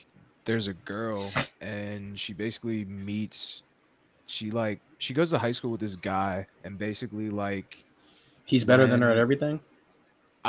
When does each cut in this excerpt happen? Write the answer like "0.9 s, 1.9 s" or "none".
6.5 s